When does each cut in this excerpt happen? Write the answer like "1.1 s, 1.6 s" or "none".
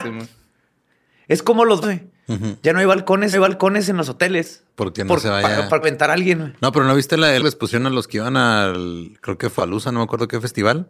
1.8 s, 3.3 s, 4.7 s, 5.8 s, 7.4 s, 9.6 s